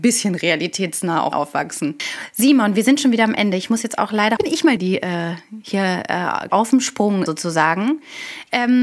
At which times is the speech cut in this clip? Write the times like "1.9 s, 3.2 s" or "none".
1.3 s, 4.4 s, 4.8 s, 6.5 s, 7.3 s